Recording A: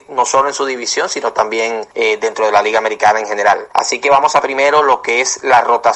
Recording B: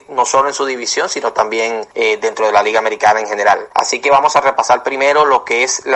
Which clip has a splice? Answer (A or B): A